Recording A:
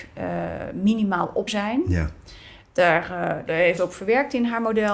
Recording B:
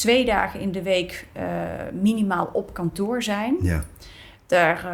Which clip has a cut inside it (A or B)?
A